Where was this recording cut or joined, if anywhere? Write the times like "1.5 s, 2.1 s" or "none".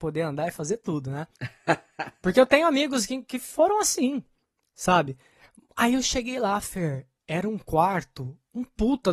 none